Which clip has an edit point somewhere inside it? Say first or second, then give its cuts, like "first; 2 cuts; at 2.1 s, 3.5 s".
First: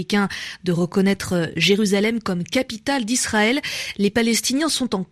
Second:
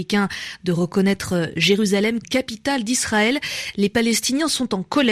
second; 1 cut; at 2.2 s